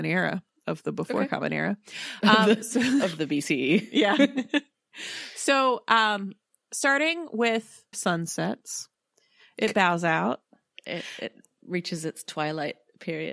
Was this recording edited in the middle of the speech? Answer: yes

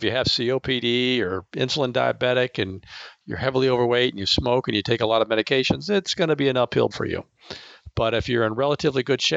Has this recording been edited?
yes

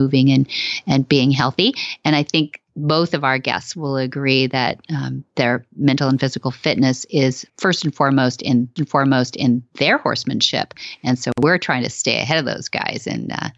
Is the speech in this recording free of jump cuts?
no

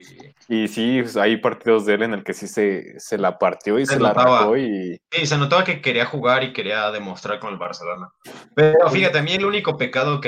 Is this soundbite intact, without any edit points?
yes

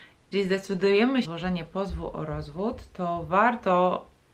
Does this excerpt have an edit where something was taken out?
yes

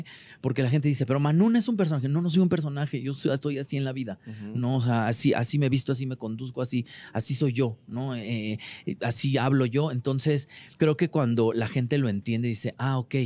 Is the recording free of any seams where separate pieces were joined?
no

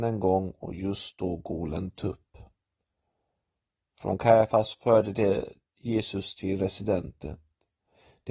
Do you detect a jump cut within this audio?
no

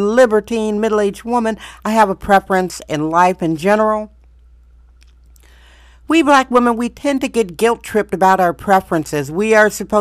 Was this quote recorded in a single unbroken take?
yes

